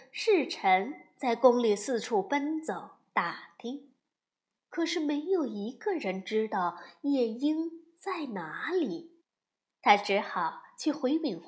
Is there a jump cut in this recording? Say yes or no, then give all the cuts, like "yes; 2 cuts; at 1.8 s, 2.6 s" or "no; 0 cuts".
no; 0 cuts